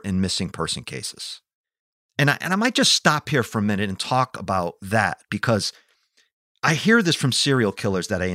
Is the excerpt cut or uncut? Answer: uncut